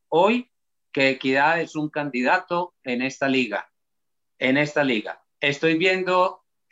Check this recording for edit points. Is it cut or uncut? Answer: uncut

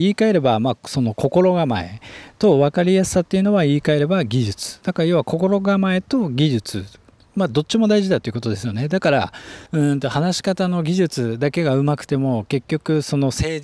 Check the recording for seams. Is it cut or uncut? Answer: cut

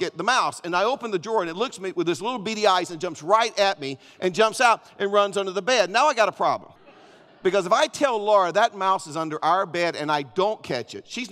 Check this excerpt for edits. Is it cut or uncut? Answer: cut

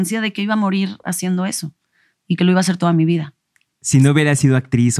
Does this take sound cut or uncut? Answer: uncut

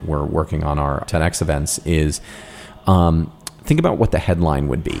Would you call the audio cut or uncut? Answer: cut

